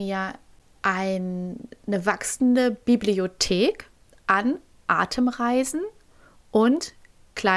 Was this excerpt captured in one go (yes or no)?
yes